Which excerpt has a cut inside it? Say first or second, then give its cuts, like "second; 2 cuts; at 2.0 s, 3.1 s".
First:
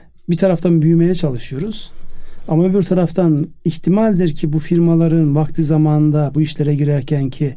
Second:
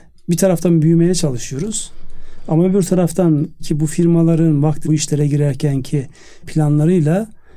second; 3 cuts; at 3.6 s, 4.8 s, 6.4 s